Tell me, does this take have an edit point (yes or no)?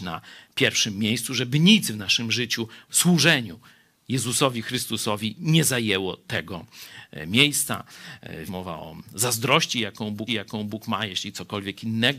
yes